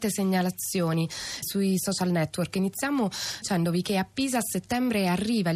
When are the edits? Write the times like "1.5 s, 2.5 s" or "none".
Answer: 1.4 s, 3.4 s